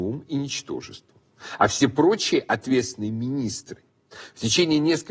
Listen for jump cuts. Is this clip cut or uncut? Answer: uncut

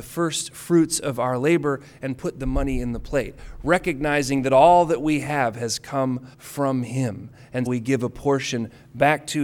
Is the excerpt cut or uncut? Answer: cut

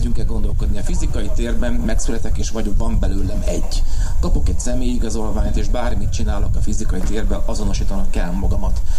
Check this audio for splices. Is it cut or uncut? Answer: uncut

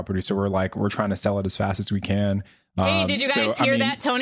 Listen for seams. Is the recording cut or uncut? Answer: uncut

